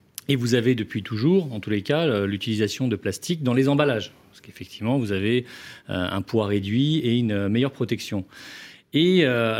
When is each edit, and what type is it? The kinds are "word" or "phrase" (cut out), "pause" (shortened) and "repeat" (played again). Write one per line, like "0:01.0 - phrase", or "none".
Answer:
none